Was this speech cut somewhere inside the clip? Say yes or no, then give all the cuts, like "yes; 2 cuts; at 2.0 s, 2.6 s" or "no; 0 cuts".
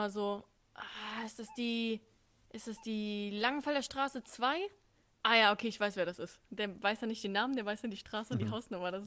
no; 0 cuts